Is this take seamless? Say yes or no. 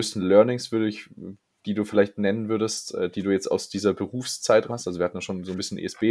no